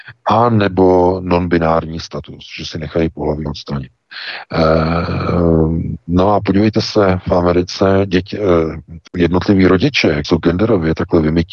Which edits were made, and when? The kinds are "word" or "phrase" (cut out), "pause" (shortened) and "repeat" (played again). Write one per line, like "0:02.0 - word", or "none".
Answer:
0:03.5 - word
0:09.1 - word
0:10.2 - word

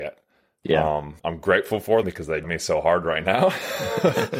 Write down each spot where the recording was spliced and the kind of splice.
0:01.2 - pause
0:02.0 - word
0:02.4 - word

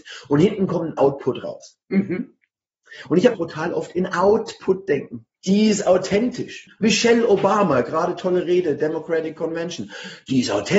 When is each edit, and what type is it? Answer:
0:01.0 - word
0:01.8 - pause
0:03.3 - phrase
0:05.3 - pause

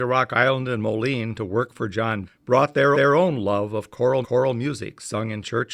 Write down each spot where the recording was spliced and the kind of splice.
0:02.2 - word
0:02.9 - repeat
0:04.2 - repeat

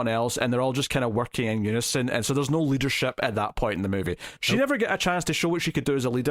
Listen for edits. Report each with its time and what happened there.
0:04.4 - word

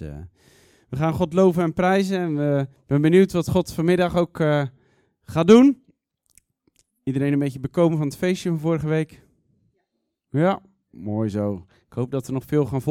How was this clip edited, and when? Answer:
none

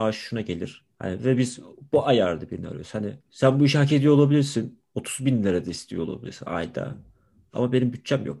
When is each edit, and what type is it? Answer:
0:03.2 - pause

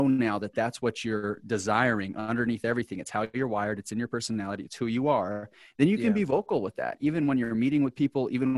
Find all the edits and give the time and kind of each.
none

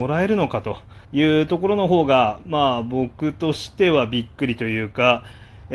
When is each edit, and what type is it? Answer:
0:01.0 - pause

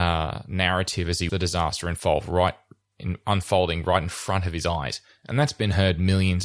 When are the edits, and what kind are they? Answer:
0:01.3 - word
0:05.1 - pause

